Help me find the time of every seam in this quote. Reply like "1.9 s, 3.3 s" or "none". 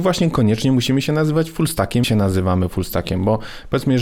2.0 s